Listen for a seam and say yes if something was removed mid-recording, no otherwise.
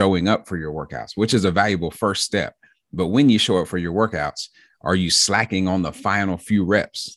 no